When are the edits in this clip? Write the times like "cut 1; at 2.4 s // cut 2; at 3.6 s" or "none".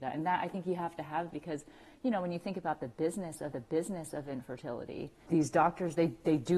cut 1; at 1.3 s // cut 2; at 3.5 s